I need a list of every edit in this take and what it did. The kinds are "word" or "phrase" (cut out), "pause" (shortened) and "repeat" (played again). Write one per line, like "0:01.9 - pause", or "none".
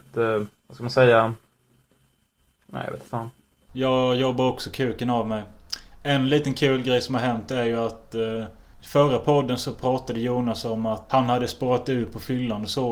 none